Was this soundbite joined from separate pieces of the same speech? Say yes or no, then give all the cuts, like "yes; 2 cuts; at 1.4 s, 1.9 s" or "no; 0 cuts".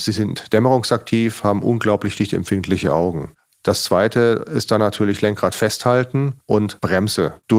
no; 0 cuts